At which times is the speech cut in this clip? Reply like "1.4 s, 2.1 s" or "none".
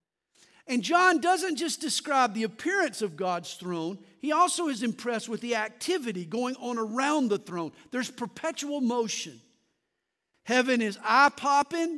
none